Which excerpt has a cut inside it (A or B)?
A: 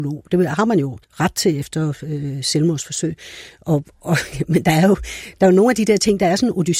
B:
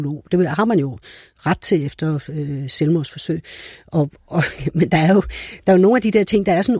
A